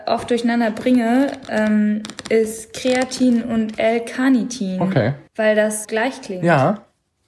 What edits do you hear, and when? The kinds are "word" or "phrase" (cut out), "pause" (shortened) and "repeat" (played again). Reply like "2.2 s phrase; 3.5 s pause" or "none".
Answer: 5.3 s pause; 5.8 s word